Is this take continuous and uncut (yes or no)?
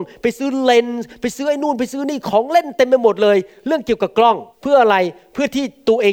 no